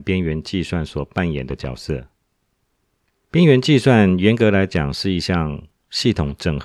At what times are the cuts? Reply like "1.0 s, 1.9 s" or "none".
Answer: none